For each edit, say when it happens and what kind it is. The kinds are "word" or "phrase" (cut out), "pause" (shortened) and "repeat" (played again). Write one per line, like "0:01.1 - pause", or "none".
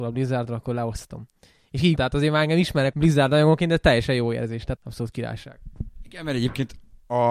0:02.0 - phrase
0:02.9 - phrase
0:04.8 - word